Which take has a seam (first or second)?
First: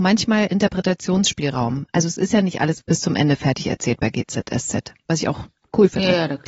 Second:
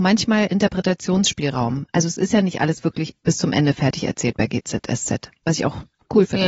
first